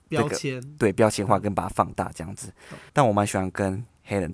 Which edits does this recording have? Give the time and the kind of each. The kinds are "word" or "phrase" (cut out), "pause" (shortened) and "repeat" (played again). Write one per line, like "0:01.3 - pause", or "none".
0:02.9 - pause

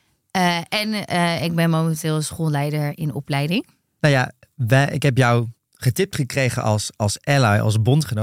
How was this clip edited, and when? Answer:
none

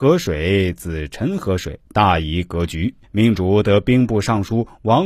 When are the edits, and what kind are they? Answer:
0:01.9 - pause
0:03.0 - pause

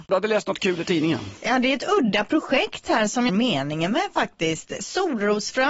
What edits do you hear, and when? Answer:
0:03.3 - phrase

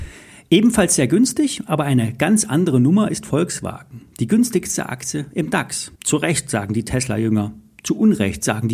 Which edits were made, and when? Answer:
0:06.0 - pause

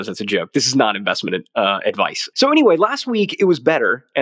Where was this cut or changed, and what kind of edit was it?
none

